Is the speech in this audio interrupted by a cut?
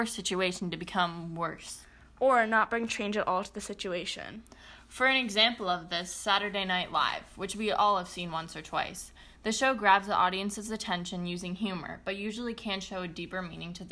no; 0 cuts

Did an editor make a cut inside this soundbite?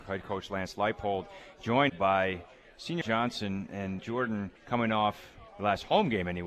yes; 5 cuts; at 1.9 s, 3.0 s, 4.0 s, 4.6 s, 5.5 s

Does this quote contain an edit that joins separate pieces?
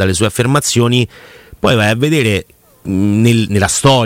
no; 0 cuts

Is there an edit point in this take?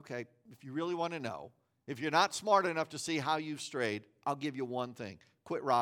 no; 0 cuts

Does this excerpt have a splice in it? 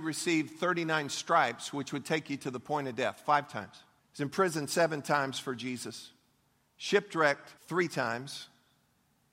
yes; 2 cuts; at 4.0 s, 7.6 s

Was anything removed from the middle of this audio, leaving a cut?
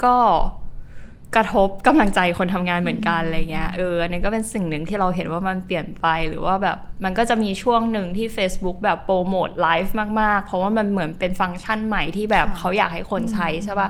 no; 0 cuts

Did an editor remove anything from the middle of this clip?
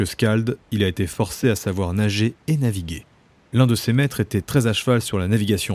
no; 0 cuts

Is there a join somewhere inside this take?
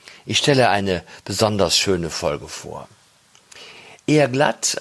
no; 0 cuts

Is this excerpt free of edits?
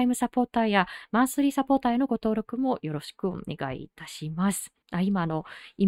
no; 1 cut; at 4.8 s

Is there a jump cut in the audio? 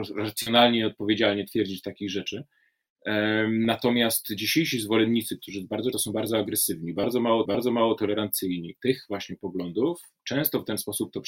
yes; 3 cuts; at 5.9 s, 7.5 s, 10.2 s

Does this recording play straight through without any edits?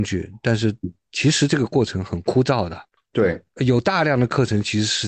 yes; 0 cuts

